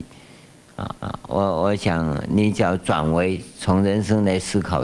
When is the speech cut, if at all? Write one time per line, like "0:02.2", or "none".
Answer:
0:01.0